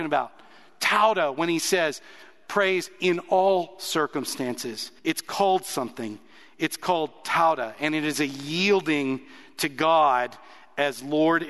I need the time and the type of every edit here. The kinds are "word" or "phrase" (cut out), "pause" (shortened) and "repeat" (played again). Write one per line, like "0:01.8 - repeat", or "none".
0:05.0 - pause